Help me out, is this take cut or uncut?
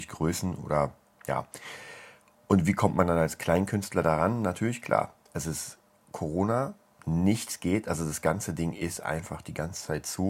uncut